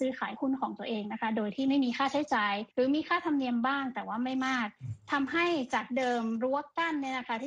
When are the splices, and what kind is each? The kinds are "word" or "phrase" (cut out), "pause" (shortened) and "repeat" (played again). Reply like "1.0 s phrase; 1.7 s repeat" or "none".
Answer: 2.7 s pause